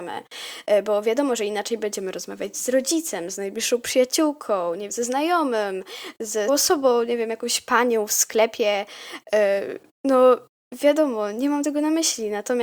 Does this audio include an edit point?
yes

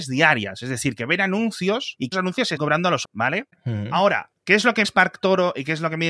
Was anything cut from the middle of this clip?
yes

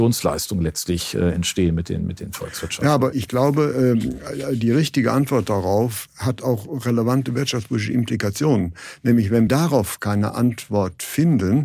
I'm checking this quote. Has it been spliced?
yes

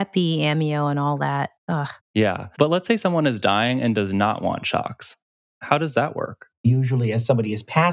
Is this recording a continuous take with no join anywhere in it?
no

